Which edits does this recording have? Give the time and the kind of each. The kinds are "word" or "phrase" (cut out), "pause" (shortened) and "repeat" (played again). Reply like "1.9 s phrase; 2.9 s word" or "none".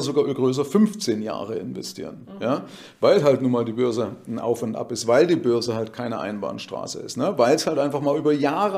none